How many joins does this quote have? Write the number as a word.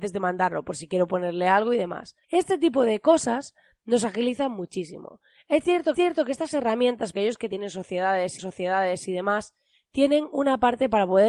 four